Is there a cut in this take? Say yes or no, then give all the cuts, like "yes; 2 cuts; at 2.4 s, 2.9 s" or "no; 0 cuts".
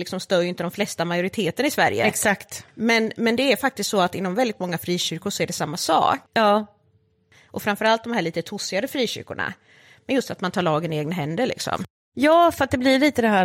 yes; 1 cut; at 6.3 s